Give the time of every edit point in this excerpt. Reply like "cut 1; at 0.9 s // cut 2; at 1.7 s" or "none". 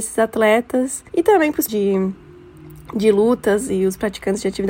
cut 1; at 1.1 s // cut 2; at 1.7 s